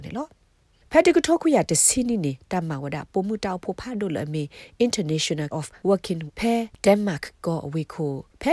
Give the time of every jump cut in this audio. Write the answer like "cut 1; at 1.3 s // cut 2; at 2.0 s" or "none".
cut 1; at 5.5 s // cut 2; at 6.3 s